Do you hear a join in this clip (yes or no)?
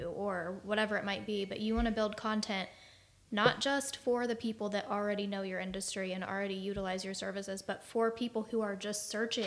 no